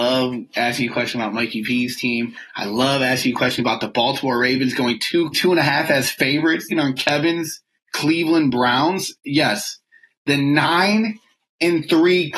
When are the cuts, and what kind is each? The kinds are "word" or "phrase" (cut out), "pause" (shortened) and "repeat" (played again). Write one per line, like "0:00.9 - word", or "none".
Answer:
0:05.3 - phrase
0:06.7 - word
0:09.2 - pause